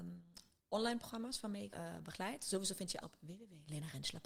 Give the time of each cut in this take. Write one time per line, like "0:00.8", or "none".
0:01.7
0:03.0